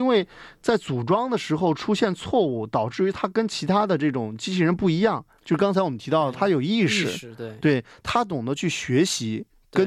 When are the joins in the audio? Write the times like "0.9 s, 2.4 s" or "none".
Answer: none